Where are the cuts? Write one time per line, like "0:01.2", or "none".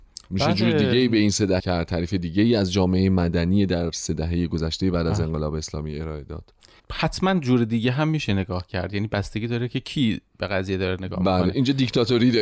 0:01.6
0:06.8